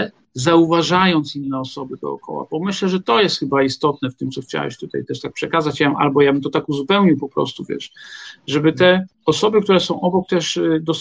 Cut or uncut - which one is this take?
cut